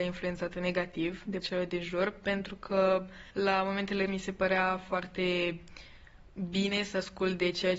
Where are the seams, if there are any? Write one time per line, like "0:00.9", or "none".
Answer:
0:01.4
0:03.3
0:04.1